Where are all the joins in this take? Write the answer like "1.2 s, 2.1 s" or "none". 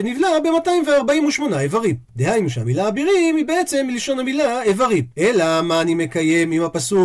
2.0 s, 5.1 s